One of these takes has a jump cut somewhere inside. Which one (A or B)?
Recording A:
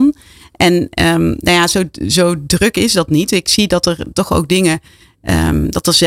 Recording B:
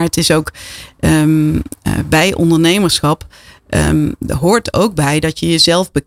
A